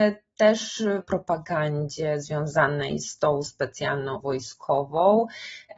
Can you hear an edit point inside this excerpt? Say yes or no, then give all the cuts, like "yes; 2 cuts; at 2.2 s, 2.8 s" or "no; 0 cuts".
yes; 2 cuts; at 1.0 s, 4.2 s